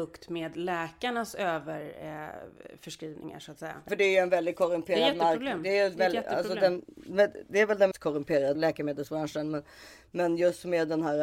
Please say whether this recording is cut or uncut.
cut